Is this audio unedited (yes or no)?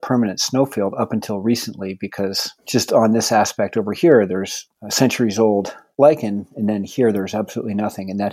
no